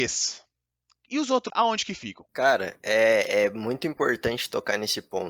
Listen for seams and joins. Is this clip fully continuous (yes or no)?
no